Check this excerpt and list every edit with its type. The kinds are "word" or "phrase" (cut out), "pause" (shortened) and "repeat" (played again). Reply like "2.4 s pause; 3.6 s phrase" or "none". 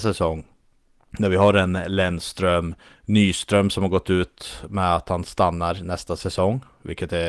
none